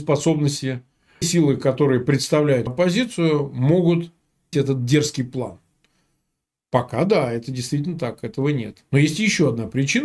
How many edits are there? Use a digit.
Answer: 3